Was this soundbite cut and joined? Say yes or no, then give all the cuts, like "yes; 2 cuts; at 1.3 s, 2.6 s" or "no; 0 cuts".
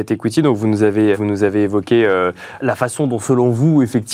yes; 2 cuts; at 1.1 s, 2.6 s